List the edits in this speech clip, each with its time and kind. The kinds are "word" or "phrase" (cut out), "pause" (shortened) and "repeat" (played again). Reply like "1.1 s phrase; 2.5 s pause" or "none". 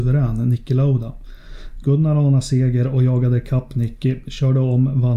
none